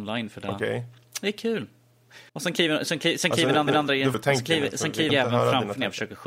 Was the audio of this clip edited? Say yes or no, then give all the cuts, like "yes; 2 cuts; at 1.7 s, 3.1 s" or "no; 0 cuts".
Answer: yes; 4 cuts; at 2.3 s, 3.7 s, 4.1 s, 5.1 s